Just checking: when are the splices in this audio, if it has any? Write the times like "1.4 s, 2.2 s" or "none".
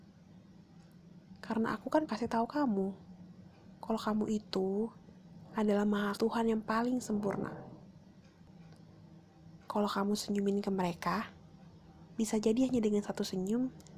2.1 s, 6.2 s